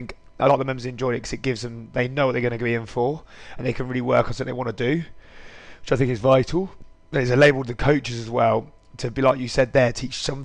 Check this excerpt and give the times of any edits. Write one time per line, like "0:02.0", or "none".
none